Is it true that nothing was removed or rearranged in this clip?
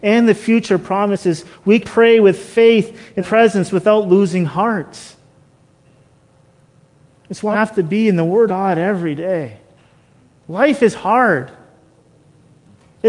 no; 4 cuts; at 1.8 s, 3.2 s, 7.5 s, 8.5 s

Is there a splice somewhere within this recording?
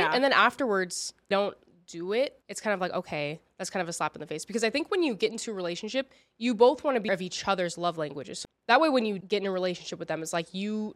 yes; 4 cuts; at 1.3 s, 2.4 s, 7.1 s, 9.2 s

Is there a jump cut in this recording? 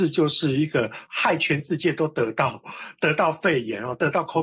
yes; 1 cut; at 1.1 s

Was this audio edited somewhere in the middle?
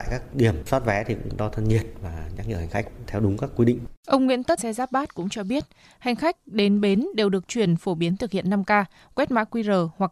yes; 3 cuts; at 4.0 s, 4.6 s, 7.5 s

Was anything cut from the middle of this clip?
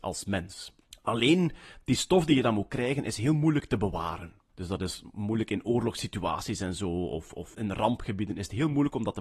yes; 3 cuts; at 0.9 s, 4.5 s, 7.5 s

